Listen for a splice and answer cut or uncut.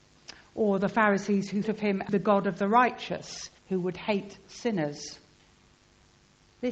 cut